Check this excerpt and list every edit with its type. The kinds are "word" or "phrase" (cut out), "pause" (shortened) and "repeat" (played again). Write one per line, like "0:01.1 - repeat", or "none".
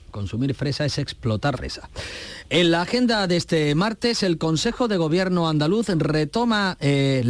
0:01.5 - word